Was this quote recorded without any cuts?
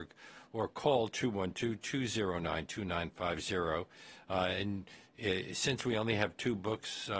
yes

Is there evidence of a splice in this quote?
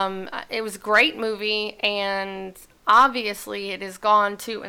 no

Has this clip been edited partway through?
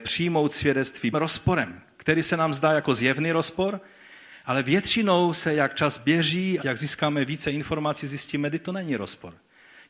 yes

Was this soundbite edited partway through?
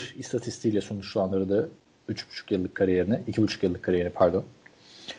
no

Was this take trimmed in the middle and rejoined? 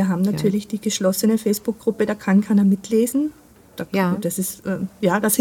no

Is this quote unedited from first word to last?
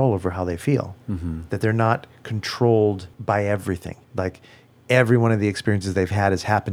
no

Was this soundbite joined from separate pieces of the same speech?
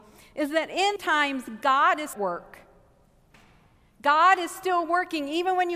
yes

